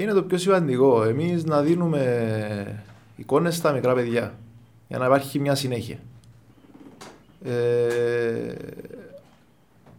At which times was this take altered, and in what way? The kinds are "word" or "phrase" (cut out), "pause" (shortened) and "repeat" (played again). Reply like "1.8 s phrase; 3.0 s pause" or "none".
none